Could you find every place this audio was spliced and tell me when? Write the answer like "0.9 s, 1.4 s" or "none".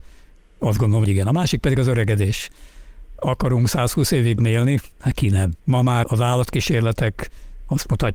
1.0 s, 4.4 s, 4.9 s, 5.6 s, 6.0 s